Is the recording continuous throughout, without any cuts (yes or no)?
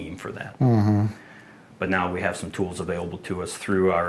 yes